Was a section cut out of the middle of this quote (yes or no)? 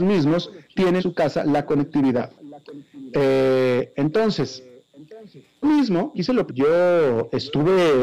yes